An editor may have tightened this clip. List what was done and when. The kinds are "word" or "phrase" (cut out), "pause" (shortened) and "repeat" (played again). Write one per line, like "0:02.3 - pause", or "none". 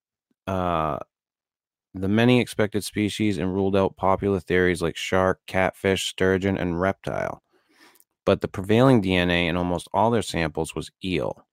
none